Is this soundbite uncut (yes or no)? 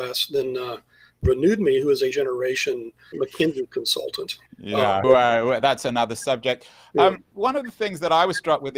no